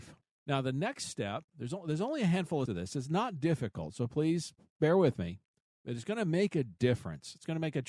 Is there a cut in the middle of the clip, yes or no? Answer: yes